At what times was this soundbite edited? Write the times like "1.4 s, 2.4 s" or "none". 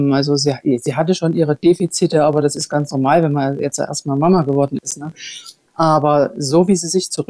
none